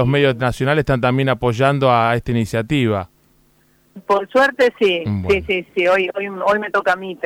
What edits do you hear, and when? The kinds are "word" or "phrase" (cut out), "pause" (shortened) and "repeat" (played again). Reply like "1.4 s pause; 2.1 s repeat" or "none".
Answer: 5.7 s word